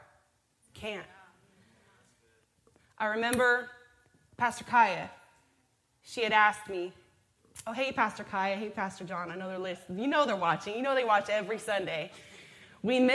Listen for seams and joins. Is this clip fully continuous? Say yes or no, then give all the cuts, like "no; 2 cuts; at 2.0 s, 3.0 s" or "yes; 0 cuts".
yes; 0 cuts